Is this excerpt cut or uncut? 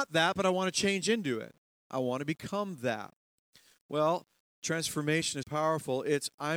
cut